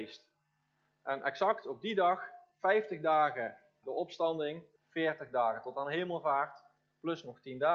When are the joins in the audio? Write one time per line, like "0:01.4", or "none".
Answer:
0:03.8
0:04.8